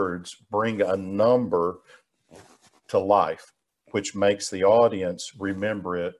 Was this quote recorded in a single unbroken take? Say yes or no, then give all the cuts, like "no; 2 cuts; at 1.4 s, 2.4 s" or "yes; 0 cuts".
yes; 0 cuts